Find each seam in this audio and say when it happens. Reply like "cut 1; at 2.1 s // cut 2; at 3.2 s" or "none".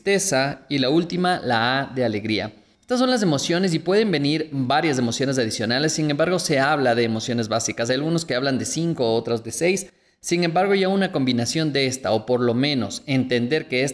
none

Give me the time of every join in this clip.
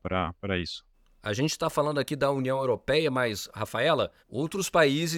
cut 1; at 0.9 s // cut 2; at 4.2 s

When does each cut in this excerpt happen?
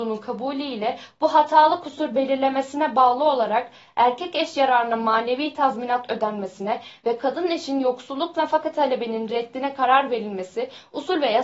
none

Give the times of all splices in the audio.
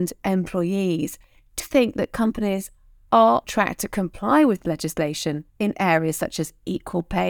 cut 1; at 1.6 s // cut 2; at 3.4 s // cut 3; at 5.5 s

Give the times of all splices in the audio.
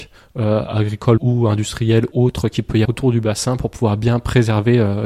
cut 1; at 1.2 s // cut 2; at 2.1 s // cut 3; at 2.8 s

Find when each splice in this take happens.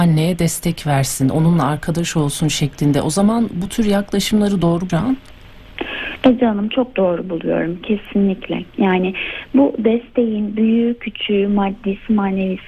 cut 1; at 4.9 s

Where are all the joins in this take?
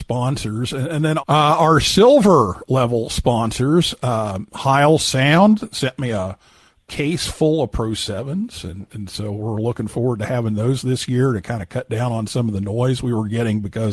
cut 1; at 1.2 s

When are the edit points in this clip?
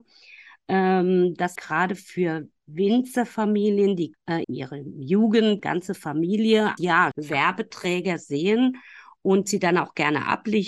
cut 1; at 1.6 s // cut 2; at 4.1 s // cut 3; at 4.4 s // cut 4; at 5.6 s // cut 5; at 6.8 s // cut 6; at 7.1 s

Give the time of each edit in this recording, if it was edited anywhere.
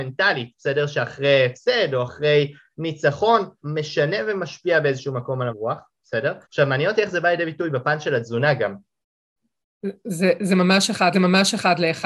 cut 1; at 3.6 s // cut 2; at 5.5 s // cut 3; at 6.4 s // cut 4; at 11.1 s

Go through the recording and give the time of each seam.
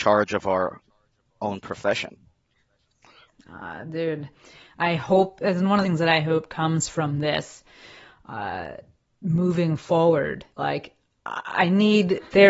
cut 1; at 5.8 s // cut 2; at 10.5 s

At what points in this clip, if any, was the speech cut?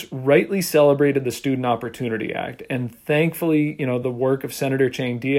none

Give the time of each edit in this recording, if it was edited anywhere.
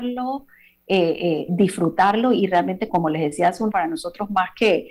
cut 1; at 1.5 s // cut 2; at 2.9 s // cut 3; at 3.7 s

